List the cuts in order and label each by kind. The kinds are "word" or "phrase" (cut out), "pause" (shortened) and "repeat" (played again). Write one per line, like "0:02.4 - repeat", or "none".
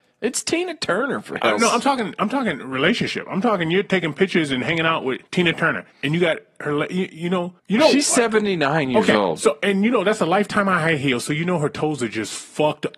0:01.7 - phrase
0:05.3 - pause
0:05.9 - pause
0:07.6 - pause